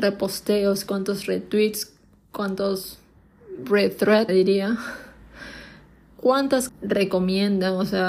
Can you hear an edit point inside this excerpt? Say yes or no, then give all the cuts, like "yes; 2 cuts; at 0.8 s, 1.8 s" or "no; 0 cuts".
yes; 2 cuts; at 4.3 s, 6.7 s